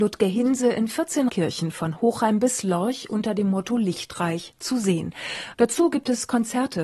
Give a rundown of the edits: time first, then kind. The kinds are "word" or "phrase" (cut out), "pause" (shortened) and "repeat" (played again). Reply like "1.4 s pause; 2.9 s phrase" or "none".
1.3 s word